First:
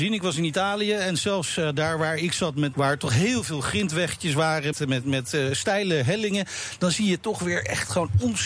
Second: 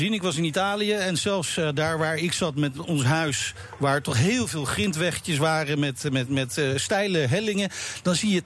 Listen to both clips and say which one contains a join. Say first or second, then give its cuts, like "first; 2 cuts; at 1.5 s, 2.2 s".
first; 2 cuts; at 2.7 s, 4.7 s